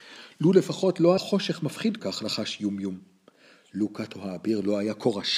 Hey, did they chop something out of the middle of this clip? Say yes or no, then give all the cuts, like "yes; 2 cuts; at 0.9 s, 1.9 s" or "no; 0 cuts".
yes; 2 cuts; at 1.2 s, 2.0 s